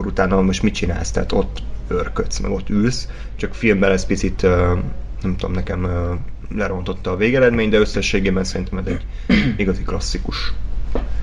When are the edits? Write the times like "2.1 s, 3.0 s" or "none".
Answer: none